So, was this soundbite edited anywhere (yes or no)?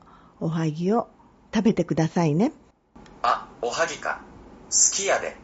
yes